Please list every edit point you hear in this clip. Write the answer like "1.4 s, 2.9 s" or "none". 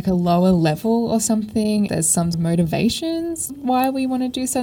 1.9 s, 2.3 s, 3.5 s